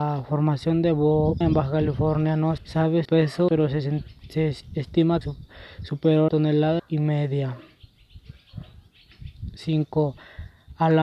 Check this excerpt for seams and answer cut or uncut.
cut